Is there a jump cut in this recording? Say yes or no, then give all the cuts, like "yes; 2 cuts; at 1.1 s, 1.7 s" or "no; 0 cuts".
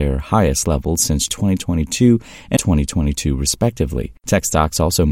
yes; 3 cuts; at 1.3 s, 2.6 s, 4.2 s